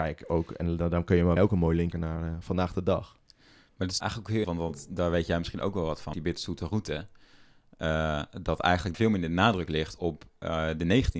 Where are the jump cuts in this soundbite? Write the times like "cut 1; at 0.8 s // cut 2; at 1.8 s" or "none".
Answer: cut 1; at 1.4 s // cut 2; at 1.9 s // cut 3; at 4.0 s // cut 4; at 4.4 s // cut 5; at 6.1 s // cut 6; at 8.9 s